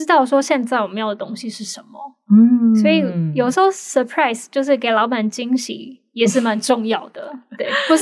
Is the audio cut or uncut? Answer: uncut